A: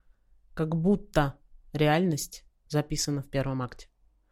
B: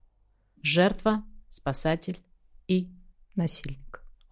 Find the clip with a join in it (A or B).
A